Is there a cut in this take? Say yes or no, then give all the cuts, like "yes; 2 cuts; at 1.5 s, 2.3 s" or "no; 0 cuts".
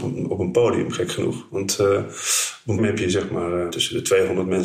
yes; 2 cuts; at 2.8 s, 3.7 s